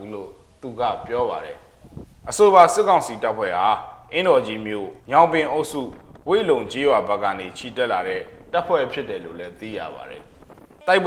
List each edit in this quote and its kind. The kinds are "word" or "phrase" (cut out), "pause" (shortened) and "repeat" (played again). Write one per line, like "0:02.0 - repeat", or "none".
0:05.0 - pause